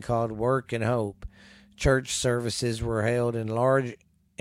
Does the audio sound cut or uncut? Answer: uncut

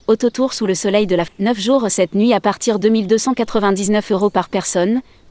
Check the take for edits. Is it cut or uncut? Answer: cut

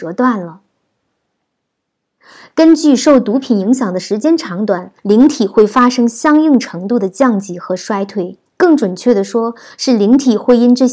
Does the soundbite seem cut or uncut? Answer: cut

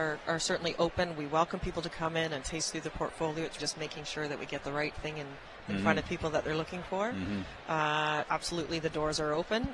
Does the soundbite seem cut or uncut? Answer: cut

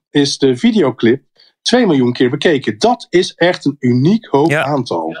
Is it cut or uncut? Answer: uncut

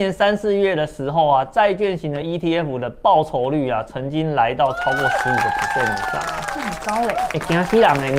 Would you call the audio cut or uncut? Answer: uncut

